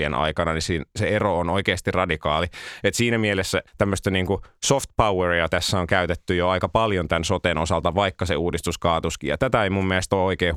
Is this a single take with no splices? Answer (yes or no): no